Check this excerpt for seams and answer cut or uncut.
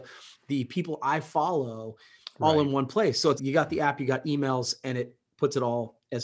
cut